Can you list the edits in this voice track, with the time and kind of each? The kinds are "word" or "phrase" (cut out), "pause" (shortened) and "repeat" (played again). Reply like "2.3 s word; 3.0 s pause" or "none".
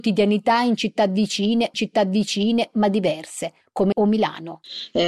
1.7 s repeat; 3.9 s word